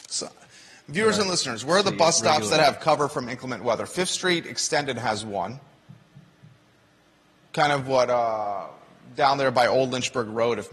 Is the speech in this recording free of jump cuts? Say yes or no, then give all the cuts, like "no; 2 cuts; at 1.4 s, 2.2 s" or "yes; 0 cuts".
yes; 0 cuts